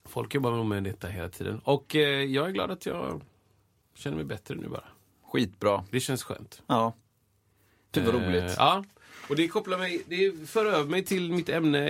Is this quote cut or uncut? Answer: uncut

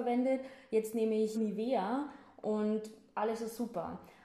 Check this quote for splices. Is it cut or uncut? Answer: cut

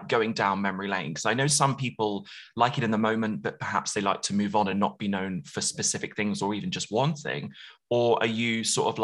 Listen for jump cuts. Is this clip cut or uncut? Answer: uncut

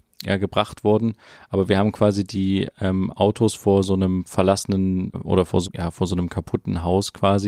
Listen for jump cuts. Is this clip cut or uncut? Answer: cut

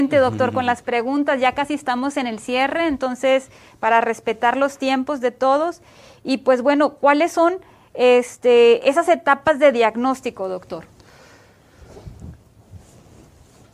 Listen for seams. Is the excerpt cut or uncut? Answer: uncut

